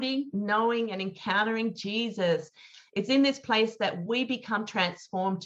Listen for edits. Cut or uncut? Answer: uncut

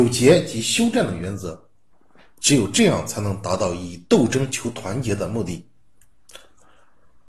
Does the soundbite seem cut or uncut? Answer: uncut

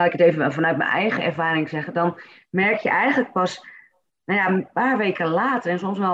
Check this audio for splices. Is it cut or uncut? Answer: uncut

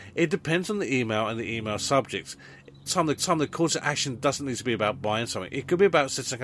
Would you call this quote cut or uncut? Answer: cut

